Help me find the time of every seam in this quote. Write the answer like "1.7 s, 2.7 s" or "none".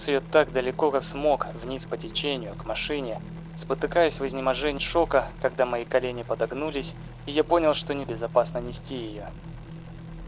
1.0 s, 4.8 s, 8.0 s